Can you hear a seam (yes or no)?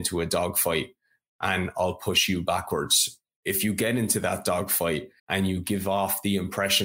yes